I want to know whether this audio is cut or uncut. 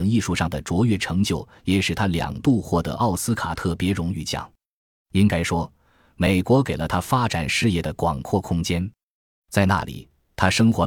uncut